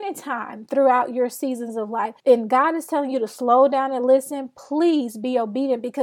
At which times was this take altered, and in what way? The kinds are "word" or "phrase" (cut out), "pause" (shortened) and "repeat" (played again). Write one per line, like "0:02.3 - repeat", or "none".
0:02.2 - pause